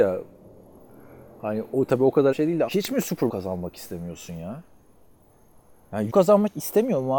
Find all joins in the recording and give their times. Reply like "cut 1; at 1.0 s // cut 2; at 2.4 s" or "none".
cut 1; at 2.3 s // cut 2; at 2.7 s // cut 3; at 3.3 s // cut 4; at 6.1 s